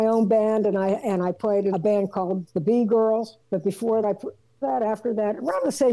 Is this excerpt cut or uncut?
cut